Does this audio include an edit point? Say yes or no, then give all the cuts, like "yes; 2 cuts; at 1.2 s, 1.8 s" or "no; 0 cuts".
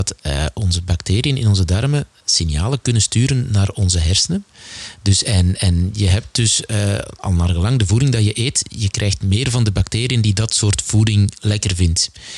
no; 0 cuts